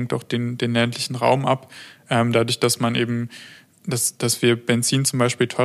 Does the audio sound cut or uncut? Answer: uncut